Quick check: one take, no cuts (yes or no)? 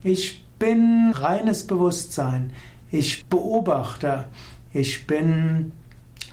no